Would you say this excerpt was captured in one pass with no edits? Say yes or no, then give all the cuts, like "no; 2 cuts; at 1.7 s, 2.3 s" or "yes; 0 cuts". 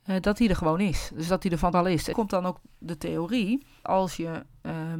no; 3 cuts; at 1.7 s, 2.1 s, 3.8 s